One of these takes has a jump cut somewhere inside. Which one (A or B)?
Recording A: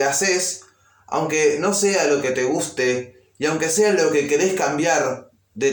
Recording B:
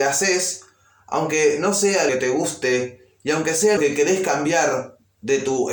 B